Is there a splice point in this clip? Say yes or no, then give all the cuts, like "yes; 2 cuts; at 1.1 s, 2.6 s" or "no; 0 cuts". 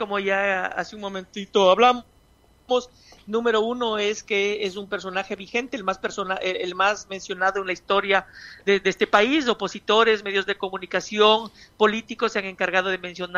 no; 0 cuts